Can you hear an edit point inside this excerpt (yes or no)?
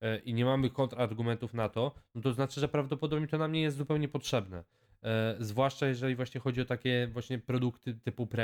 no